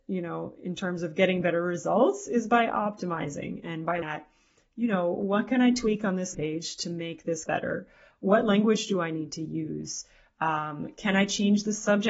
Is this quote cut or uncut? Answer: cut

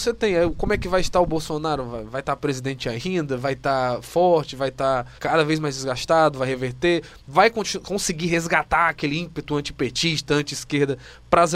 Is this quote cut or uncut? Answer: cut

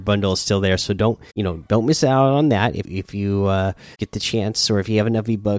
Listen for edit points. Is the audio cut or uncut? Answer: cut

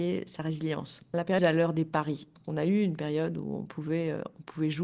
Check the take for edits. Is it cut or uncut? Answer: cut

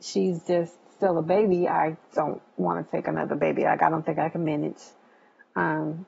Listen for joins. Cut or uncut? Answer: uncut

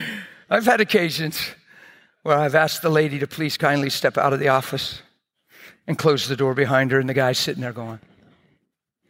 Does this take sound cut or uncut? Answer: uncut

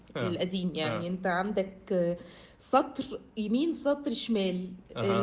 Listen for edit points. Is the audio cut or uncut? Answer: uncut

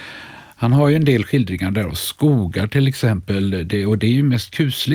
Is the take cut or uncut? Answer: uncut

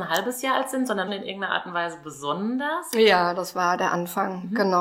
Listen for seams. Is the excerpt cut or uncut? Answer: cut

